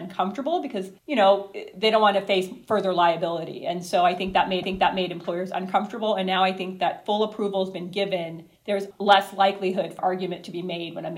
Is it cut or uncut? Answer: cut